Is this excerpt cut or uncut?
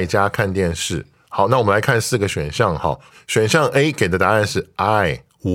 uncut